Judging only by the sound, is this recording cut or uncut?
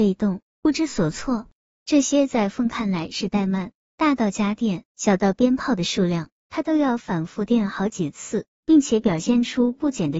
cut